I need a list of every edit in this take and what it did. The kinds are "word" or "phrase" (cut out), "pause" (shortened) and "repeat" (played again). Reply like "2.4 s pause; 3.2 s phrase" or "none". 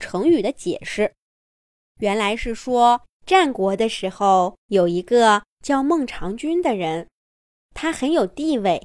3.1 s pause; 4.6 s pause

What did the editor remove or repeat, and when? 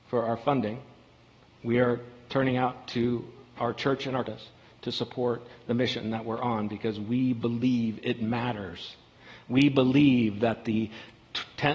4.3 s phrase

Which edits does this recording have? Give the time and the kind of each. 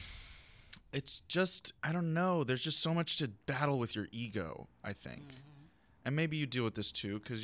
1.8 s pause

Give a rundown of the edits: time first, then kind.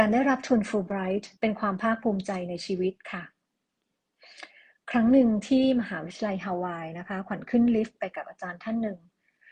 1.4 s pause

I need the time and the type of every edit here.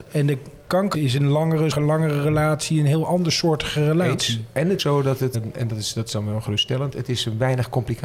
0.9 s word; 1.7 s word; 4.8 s word; 5.3 s word

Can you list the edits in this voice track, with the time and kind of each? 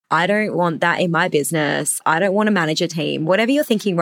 none

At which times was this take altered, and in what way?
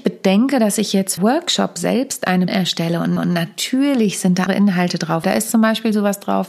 1.2 s phrase; 2.5 s word; 3.2 s repeat; 4.5 s word; 5.2 s word

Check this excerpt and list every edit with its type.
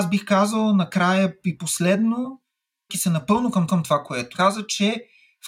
2.9 s word; 3.7 s repeat; 4.3 s word

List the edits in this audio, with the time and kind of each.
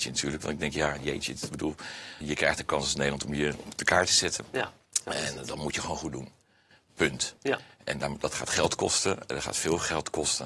2.2 s word

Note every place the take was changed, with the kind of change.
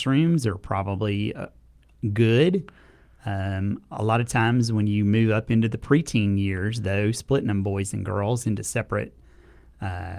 none

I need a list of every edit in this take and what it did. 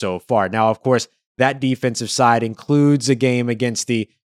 none

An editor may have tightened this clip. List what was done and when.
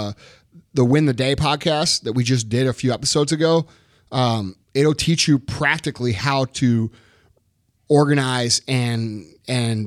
4.6 s pause

